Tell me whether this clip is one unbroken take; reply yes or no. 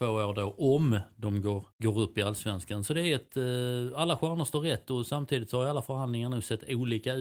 no